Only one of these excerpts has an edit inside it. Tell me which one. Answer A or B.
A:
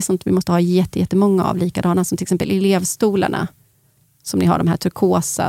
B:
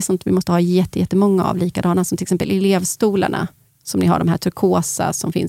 B